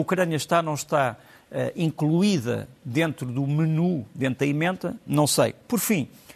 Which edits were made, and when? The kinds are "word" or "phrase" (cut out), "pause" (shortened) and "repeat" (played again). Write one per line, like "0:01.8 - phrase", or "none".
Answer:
none